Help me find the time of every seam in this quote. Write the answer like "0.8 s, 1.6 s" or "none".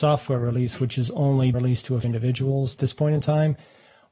1.5 s, 2.0 s, 2.8 s